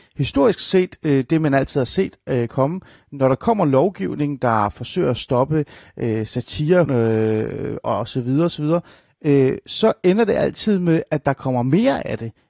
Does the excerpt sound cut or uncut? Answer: cut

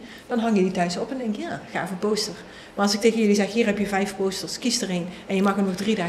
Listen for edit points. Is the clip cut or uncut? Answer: uncut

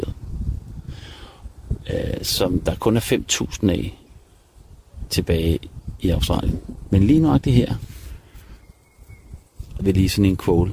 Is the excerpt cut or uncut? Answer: cut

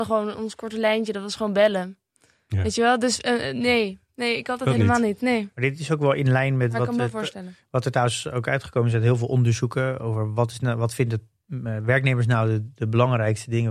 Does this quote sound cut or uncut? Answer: uncut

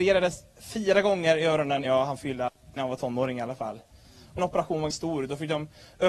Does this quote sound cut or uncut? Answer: cut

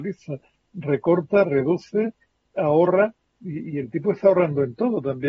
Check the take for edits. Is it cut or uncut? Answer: uncut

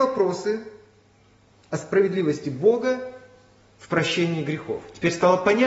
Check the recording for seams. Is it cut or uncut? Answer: uncut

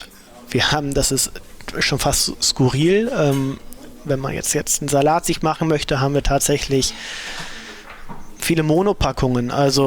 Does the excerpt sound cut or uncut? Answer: uncut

